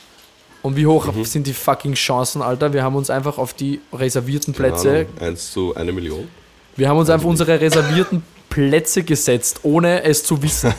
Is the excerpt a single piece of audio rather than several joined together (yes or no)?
no